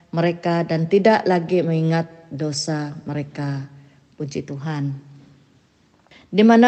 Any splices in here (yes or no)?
no